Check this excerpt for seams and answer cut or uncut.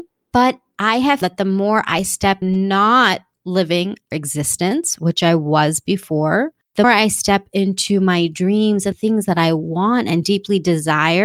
cut